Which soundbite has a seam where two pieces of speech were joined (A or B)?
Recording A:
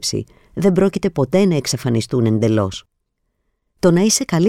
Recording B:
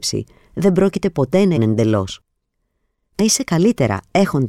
B